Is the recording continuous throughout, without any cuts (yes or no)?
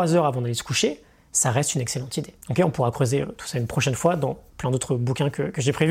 no